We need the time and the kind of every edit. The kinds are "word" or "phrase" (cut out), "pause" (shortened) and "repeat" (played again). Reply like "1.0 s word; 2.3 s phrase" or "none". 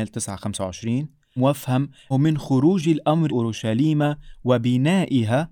1.4 s word; 2.1 s word; 3.3 s word

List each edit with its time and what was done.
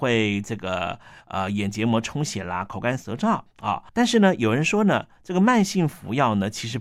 3.9 s pause

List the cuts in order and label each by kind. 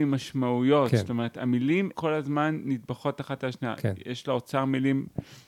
1.9 s word

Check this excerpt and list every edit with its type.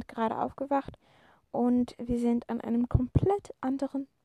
none

